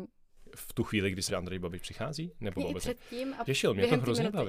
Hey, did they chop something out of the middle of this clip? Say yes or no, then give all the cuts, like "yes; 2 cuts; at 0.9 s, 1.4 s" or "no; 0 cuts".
yes; 3 cuts; at 1.3 s, 2.6 s, 3.5 s